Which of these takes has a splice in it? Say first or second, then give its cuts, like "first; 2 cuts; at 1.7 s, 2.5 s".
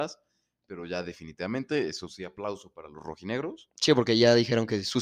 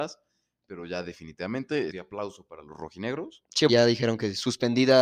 second; 2 cuts; at 1.9 s, 3.7 s